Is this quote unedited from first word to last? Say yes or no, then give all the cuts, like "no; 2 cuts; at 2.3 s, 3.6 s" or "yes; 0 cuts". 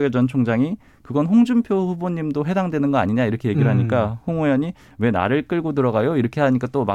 yes; 0 cuts